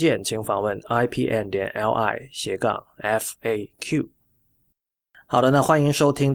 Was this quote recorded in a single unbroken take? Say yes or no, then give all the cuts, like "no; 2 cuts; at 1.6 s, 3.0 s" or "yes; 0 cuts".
yes; 0 cuts